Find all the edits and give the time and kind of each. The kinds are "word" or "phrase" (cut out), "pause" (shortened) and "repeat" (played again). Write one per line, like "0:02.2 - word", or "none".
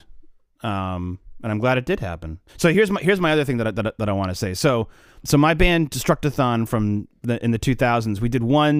0:02.5 - pause
0:05.2 - word